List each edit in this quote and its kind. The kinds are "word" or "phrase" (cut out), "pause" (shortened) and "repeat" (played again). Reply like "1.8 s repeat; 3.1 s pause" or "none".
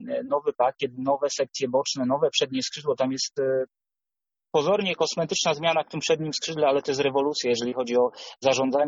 none